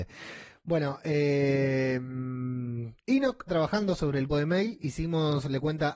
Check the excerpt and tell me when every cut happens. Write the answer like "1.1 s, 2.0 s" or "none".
3.5 s, 4.3 s